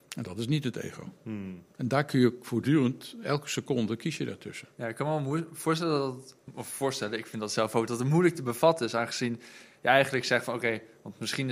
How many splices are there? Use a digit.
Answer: 2